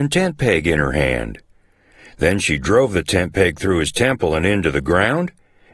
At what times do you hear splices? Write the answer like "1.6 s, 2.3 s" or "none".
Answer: none